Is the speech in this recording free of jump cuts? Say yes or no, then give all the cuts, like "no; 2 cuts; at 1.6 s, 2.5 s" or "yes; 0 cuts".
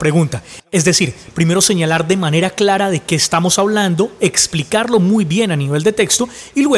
yes; 0 cuts